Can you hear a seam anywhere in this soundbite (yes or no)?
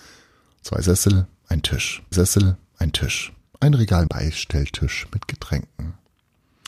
yes